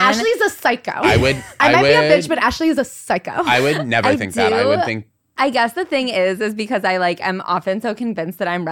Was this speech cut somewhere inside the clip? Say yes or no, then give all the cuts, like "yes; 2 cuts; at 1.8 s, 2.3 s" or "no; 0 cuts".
no; 0 cuts